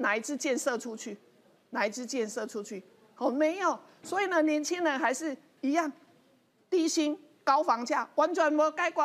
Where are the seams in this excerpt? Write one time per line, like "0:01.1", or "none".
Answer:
none